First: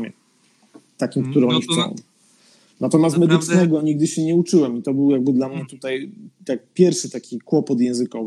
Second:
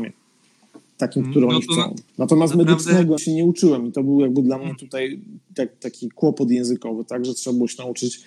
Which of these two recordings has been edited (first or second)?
second